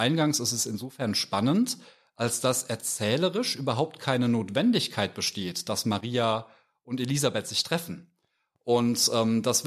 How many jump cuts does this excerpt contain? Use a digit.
0